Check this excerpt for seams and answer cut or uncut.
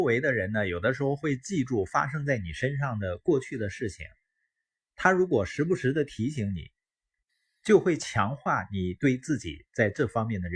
uncut